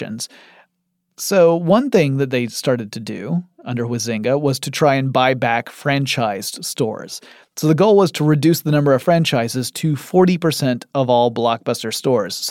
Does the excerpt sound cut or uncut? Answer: uncut